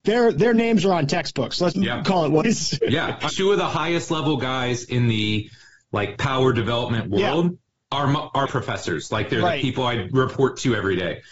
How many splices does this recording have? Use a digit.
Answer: 6